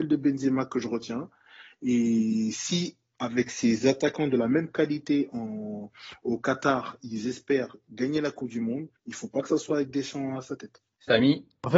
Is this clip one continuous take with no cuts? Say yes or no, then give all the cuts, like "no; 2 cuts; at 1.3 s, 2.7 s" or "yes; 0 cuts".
no; 1 cut; at 9.0 s